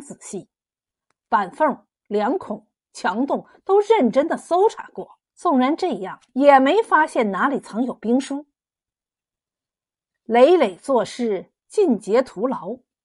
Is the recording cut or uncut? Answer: cut